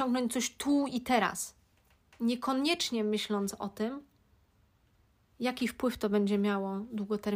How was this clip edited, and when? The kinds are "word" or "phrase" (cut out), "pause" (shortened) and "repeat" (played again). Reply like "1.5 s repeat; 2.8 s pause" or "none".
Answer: none